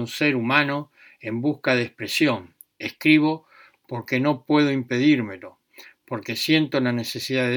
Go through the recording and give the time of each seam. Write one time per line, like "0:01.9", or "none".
none